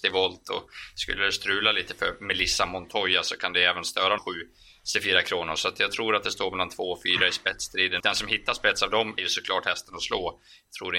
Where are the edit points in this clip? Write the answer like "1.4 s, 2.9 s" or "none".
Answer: 4.2 s, 8.0 s, 9.2 s